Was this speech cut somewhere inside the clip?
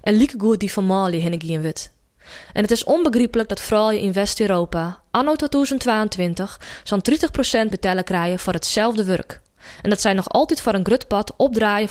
yes; 1 cut; at 7.7 s

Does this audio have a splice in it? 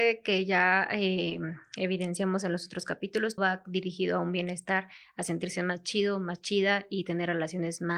yes; 1 cut; at 3.4 s

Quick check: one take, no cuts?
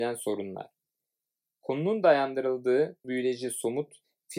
no; 1 cut; at 3.0 s

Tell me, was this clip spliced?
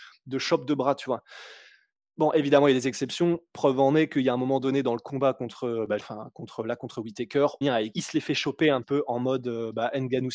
yes; 4 cuts; at 6.0 s, 7.6 s, 7.9 s, 8.8 s

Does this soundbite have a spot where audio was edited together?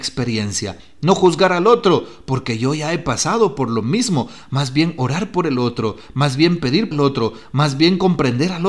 yes; 1 cut; at 6.9 s

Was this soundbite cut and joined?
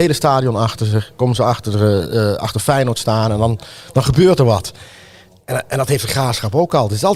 no; 0 cuts

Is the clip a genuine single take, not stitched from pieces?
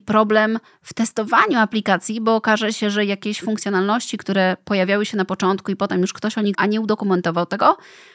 no; 1 cut; at 6.5 s

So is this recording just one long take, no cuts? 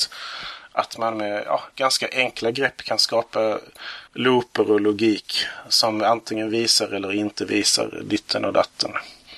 no; 1 cut; at 4.1 s

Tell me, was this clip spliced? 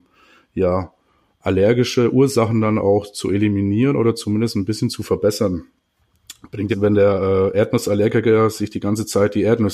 yes; 1 cut; at 6.7 s

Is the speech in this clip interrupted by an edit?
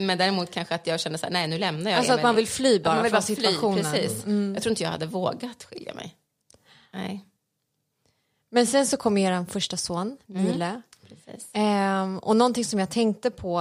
no; 0 cuts

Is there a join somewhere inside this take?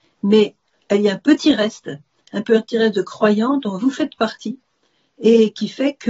no; 0 cuts

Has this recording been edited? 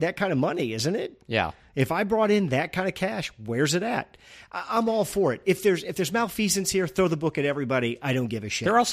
no; 0 cuts

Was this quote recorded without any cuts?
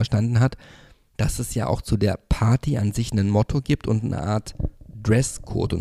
yes; 0 cuts

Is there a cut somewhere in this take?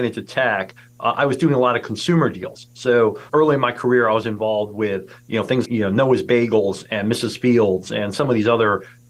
yes; 2 cuts; at 3.3 s, 5.7 s

